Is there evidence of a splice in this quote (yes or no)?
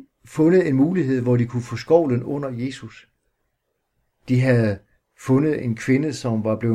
no